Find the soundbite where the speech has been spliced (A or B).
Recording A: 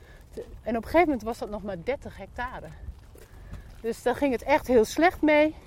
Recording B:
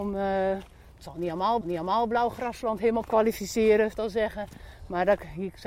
B